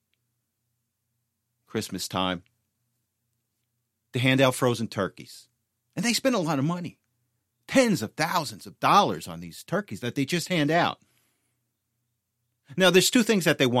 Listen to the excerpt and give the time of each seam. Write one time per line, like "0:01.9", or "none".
none